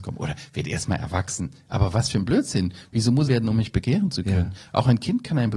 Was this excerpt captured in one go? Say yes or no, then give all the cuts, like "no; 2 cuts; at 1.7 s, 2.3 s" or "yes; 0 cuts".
no; 1 cut; at 3.3 s